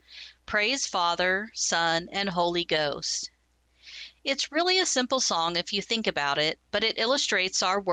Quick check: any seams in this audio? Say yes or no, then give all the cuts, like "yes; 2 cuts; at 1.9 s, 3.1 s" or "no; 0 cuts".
no; 0 cuts